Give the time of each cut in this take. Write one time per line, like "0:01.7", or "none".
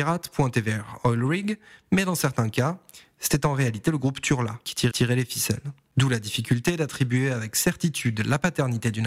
0:04.9